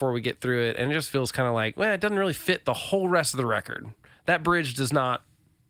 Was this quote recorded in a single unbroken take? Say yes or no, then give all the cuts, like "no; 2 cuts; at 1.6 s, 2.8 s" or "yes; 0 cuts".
yes; 0 cuts